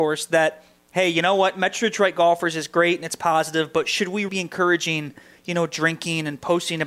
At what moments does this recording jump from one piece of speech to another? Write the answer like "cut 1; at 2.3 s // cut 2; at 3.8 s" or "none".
cut 1; at 4.3 s